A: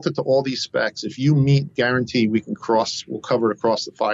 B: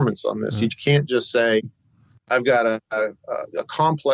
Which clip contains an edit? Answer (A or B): A